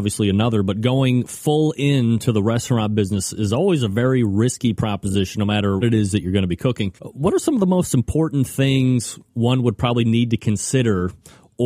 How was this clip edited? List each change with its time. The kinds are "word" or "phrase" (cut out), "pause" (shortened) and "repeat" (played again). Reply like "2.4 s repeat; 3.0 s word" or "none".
5.8 s word; 7.0 s pause